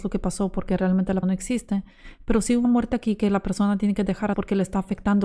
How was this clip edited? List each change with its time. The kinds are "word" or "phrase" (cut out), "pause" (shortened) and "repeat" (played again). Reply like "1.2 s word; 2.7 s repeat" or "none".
1.2 s word; 2.6 s word; 4.3 s word